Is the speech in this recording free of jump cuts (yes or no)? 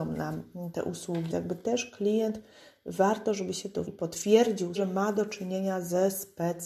no